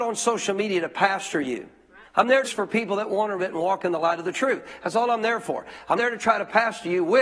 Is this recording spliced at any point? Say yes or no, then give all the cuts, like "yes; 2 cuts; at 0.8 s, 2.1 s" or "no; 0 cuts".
yes; 4 cuts; at 2.0 s, 2.4 s, 3.4 s, 6.0 s